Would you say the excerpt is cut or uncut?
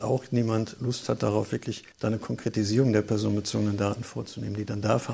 cut